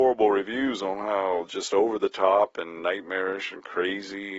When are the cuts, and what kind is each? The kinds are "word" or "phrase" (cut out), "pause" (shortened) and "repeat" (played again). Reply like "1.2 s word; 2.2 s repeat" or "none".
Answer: none

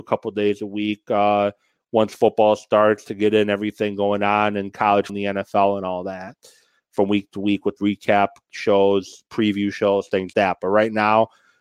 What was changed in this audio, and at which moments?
5.1 s word; 7.8 s phrase; 10.3 s word

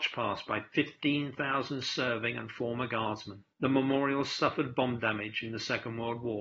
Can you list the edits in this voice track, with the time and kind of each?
3.5 s pause

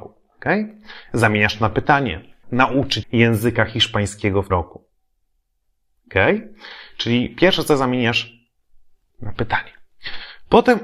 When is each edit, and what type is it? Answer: 2.4 s word; 3.0 s word; 4.5 s word; 9.1 s word

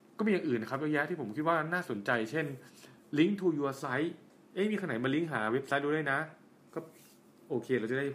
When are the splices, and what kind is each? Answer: none

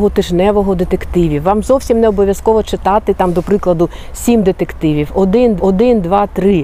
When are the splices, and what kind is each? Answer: 5.6 s repeat

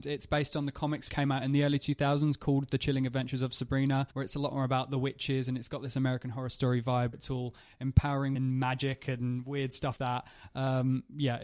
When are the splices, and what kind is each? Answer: 1.1 s word; 4.1 s pause; 7.1 s word; 8.3 s word; 10.0 s word

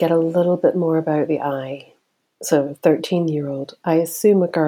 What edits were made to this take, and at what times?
none

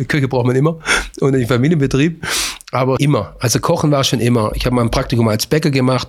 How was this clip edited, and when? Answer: 3.0 s word

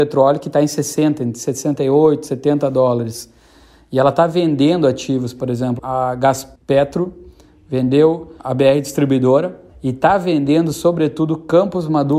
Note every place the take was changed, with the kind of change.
5.8 s word; 6.6 s pause; 8.4 s word; 9.7 s pause

